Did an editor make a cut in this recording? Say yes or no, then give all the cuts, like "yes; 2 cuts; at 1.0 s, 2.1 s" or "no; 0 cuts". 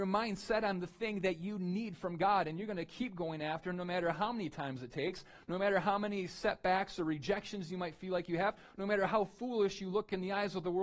no; 0 cuts